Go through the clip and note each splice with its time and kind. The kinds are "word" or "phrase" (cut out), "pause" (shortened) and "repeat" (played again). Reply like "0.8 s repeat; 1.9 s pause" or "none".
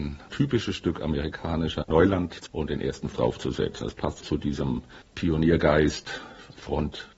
1.8 s word; 2.5 s word; 3.1 s word; 4.2 s word